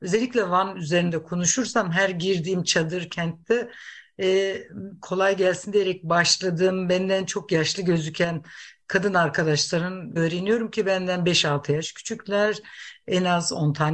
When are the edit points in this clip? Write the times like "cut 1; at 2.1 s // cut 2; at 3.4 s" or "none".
cut 1; at 10.2 s